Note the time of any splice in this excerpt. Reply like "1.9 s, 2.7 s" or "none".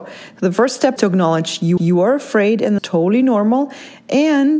1.0 s, 1.8 s, 2.8 s